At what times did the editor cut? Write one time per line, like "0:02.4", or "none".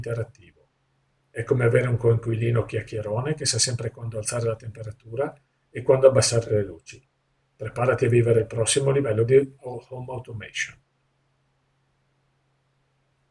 none